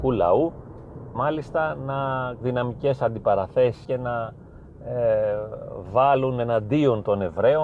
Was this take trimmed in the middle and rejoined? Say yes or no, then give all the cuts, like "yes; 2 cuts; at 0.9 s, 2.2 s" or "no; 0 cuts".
yes; 3 cuts; at 1.1 s, 2.4 s, 3.8 s